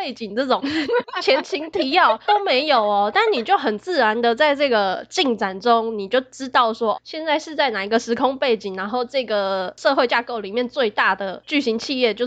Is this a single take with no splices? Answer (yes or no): no